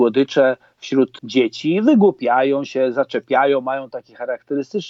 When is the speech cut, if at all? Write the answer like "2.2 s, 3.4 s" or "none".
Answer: none